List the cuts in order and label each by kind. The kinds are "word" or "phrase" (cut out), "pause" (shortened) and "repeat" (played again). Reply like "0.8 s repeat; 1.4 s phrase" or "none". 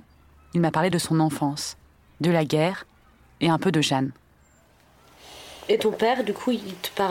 none